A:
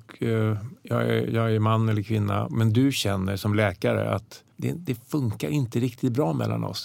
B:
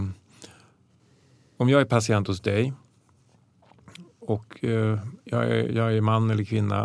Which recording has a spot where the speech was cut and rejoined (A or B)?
A